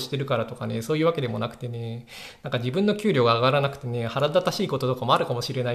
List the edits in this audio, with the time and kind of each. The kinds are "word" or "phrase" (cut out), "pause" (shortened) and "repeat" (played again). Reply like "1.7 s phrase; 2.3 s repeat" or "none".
none